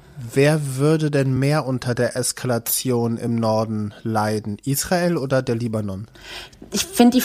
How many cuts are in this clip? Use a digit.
0